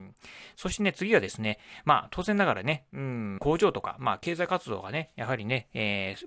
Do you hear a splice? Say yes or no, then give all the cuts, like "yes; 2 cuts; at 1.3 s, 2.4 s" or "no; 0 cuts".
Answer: yes; 1 cut; at 3.4 s